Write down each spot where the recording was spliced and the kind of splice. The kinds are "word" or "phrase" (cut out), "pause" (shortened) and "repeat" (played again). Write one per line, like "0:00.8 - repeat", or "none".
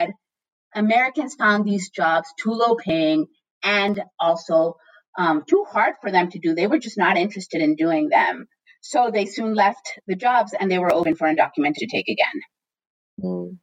0:11.8 - word